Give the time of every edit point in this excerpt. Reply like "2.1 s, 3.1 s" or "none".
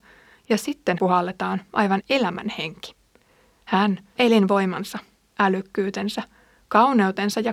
1.0 s, 2.0 s, 4.2 s